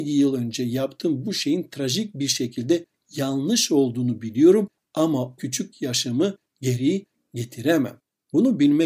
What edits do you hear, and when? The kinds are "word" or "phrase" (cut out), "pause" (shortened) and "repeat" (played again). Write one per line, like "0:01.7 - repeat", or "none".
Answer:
0:05.4 - word